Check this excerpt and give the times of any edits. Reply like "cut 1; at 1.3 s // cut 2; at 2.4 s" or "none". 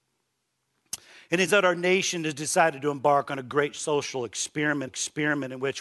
cut 1; at 1.5 s // cut 2; at 4.9 s